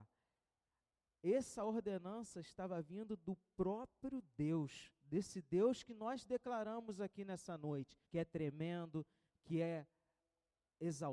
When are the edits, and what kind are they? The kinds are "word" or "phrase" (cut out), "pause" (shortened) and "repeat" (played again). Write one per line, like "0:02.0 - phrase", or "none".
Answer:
0:08.0 - pause